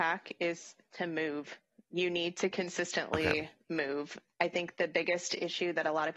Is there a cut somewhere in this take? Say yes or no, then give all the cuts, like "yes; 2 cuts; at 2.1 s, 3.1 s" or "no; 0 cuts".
no; 0 cuts